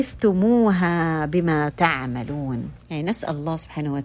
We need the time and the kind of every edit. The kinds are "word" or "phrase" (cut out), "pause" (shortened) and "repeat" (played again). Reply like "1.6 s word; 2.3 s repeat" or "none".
1.7 s word; 2.8 s pause